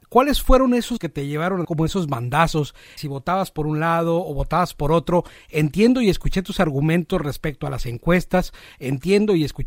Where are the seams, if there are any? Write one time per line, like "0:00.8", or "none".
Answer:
0:01.0
0:01.6
0:03.0